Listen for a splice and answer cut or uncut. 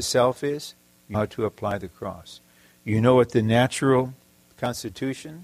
cut